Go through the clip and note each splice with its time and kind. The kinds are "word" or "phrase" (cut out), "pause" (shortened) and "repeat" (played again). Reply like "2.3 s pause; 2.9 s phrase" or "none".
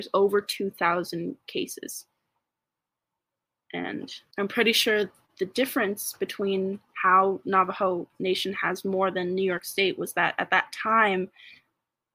none